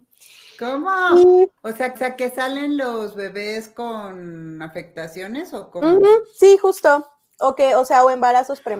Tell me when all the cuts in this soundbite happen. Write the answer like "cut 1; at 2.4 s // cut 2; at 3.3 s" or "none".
cut 1; at 1.6 s // cut 2; at 2.0 s